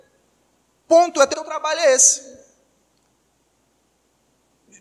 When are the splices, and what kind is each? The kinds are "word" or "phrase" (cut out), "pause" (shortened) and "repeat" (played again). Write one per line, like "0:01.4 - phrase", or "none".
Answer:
0:01.3 - word